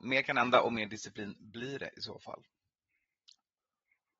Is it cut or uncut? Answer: uncut